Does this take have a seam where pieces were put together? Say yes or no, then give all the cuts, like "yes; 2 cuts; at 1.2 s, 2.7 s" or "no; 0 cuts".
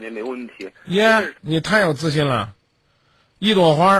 yes; 1 cut; at 1.3 s